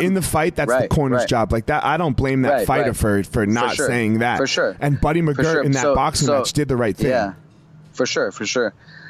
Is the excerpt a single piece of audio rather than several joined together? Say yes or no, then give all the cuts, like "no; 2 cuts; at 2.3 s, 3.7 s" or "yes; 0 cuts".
yes; 0 cuts